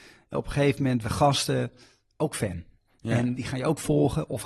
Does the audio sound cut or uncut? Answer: cut